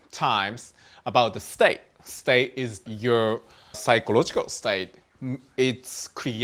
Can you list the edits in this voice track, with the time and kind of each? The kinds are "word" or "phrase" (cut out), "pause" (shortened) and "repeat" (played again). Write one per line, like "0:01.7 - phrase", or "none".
0:02.9 - word
0:03.7 - word